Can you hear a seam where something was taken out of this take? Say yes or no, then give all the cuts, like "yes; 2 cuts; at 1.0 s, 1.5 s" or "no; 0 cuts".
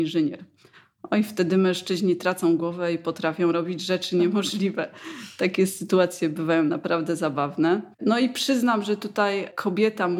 yes; 1 cut; at 7.9 s